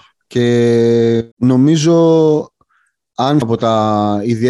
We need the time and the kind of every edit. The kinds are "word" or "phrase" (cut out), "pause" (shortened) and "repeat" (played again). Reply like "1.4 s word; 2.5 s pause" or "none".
1.3 s pause; 3.4 s word